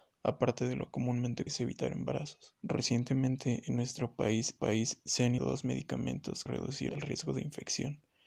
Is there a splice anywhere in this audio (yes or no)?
yes